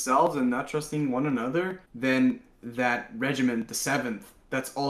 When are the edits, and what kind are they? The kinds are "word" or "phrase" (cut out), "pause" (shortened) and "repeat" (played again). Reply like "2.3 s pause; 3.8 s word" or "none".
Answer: 1.9 s pause